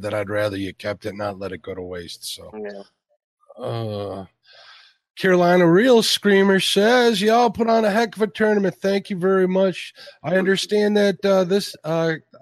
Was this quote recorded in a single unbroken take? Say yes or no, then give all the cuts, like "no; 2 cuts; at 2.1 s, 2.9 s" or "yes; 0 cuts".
yes; 0 cuts